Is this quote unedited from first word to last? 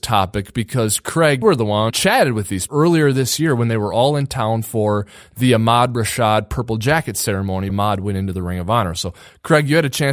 no; 4 cuts; at 1.4 s, 1.9 s, 2.7 s, 7.7 s

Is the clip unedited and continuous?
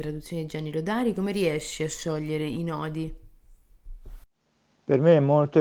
yes; 0 cuts

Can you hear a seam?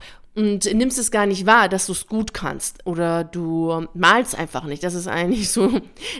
no; 0 cuts

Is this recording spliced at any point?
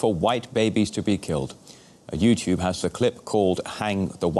yes; 1 cut; at 2.8 s

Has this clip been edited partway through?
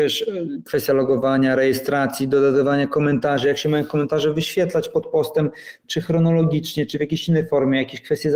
no; 0 cuts

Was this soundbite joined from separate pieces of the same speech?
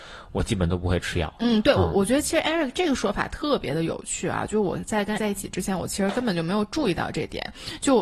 yes; 1 cut; at 5.2 s

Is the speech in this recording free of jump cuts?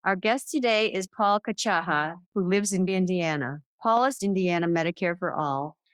no; 4 cuts; at 2.2 s, 2.9 s, 3.7 s, 4.2 s

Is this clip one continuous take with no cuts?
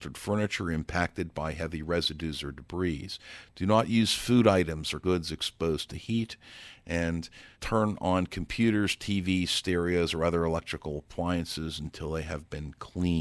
no; 2 cuts; at 5.0 s, 7.5 s

